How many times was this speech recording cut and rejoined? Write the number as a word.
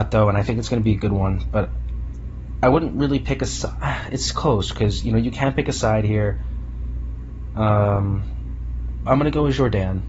zero